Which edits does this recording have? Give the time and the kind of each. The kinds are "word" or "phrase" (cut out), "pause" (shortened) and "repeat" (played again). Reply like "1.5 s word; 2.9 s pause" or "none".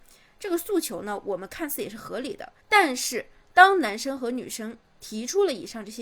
2.6 s pause